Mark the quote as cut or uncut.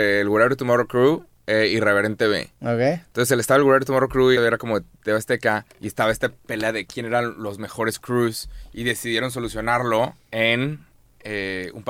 cut